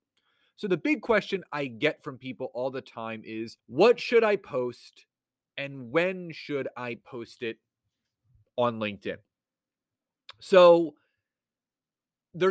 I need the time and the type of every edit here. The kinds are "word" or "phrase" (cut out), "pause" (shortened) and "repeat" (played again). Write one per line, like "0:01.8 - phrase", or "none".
0:03.6 - pause